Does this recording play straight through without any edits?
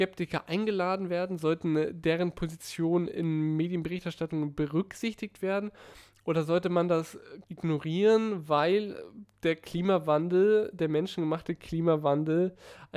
no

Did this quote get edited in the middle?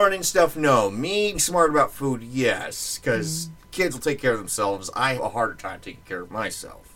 yes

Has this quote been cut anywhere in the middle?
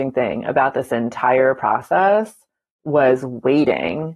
no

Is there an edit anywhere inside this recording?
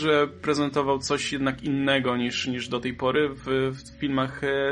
no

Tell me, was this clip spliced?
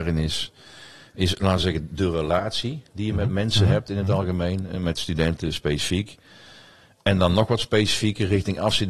no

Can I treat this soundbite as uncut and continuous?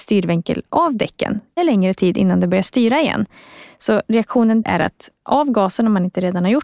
no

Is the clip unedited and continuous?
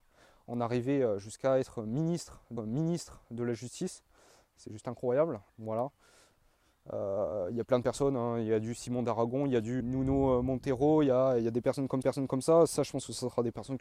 no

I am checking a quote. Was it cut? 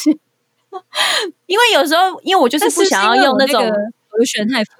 no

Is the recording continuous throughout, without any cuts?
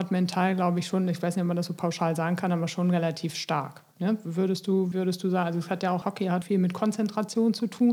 no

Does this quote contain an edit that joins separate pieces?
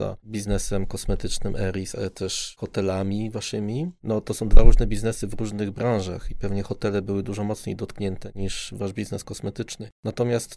no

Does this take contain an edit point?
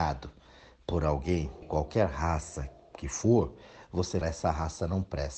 yes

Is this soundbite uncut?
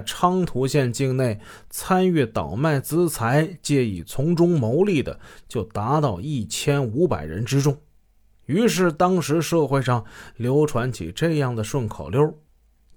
yes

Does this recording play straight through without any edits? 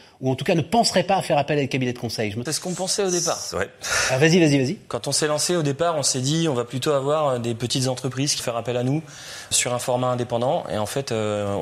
no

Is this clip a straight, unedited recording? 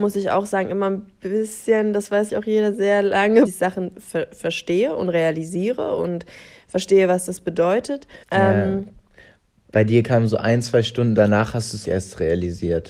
no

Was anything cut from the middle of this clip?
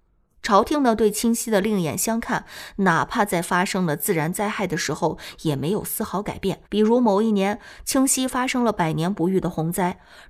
yes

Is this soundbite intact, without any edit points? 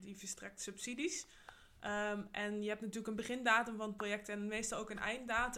yes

